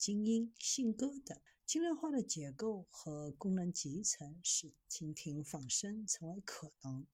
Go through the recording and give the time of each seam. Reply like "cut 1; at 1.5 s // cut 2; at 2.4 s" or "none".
cut 1; at 1.5 s

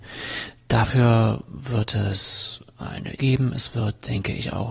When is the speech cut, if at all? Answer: cut 1; at 3.2 s

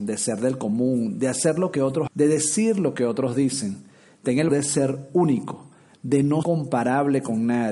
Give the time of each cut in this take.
cut 1; at 2.1 s // cut 2; at 4.5 s // cut 3; at 6.4 s

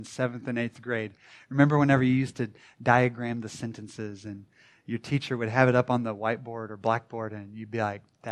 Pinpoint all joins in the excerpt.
none

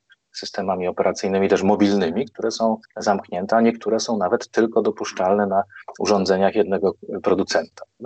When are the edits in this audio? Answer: cut 1; at 2.8 s

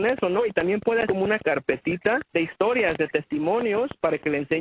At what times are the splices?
cut 1; at 1.0 s // cut 2; at 2.3 s

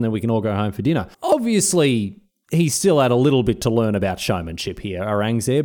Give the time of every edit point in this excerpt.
cut 1; at 1.1 s

